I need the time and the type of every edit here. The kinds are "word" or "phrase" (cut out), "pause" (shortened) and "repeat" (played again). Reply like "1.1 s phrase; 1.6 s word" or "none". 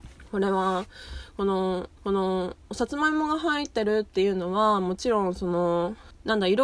2.0 s repeat